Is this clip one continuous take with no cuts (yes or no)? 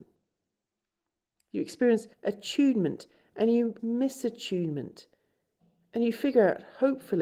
no